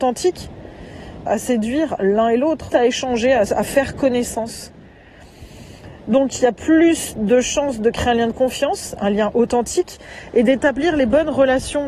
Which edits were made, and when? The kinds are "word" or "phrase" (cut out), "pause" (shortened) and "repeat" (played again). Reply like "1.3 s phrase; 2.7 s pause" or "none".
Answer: 1.3 s phrase; 2.7 s word